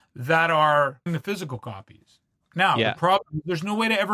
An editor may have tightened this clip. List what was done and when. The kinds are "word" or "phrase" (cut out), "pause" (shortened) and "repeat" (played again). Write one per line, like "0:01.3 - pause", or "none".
0:01.1 - word